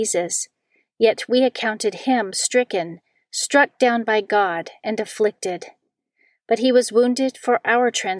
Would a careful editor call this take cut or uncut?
uncut